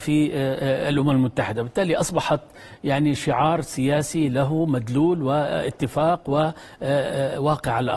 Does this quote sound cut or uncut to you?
uncut